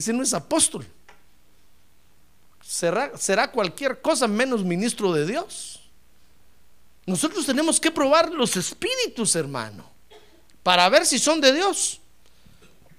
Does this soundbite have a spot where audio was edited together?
no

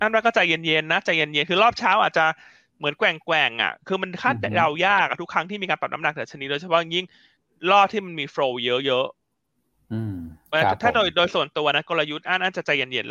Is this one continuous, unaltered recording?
yes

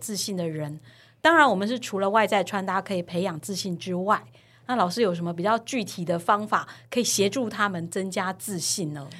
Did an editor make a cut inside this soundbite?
no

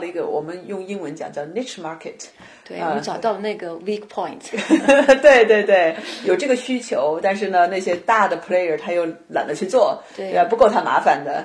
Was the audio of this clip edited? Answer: no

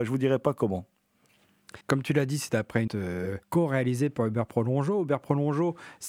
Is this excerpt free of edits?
no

